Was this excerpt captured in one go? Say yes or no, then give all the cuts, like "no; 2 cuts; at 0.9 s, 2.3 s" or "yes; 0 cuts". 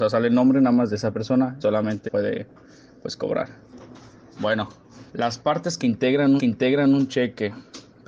no; 4 cuts; at 1.6 s, 2.1 s, 5.1 s, 6.4 s